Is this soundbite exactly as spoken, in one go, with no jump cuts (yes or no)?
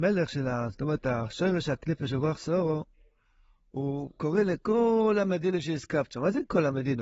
yes